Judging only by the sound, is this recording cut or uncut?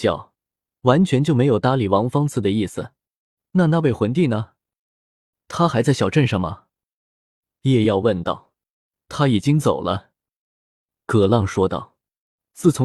uncut